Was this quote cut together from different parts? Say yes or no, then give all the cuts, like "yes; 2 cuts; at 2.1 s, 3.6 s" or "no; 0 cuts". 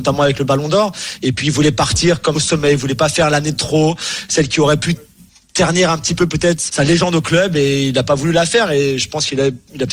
yes; 3 cuts; at 2.3 s, 5.3 s, 6.7 s